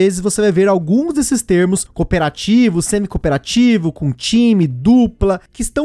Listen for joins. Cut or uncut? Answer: uncut